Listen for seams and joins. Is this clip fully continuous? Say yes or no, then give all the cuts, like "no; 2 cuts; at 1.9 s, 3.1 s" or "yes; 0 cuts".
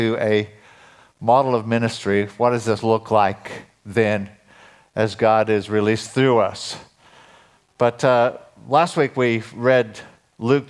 yes; 0 cuts